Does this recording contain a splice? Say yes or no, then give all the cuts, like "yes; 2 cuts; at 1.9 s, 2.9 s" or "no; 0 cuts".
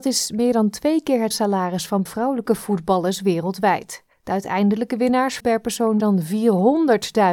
yes; 5 cuts; at 1.3 s, 2.1 s, 4.1 s, 5.4 s, 6.0 s